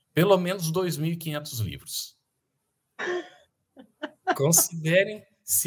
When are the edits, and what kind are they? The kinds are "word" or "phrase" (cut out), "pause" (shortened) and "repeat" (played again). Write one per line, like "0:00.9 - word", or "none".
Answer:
none